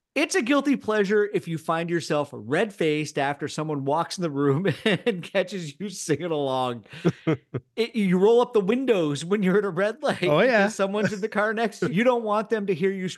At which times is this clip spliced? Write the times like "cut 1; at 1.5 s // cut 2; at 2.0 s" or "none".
cut 1; at 11.9 s